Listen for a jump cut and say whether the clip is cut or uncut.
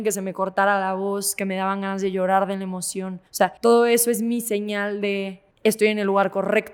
cut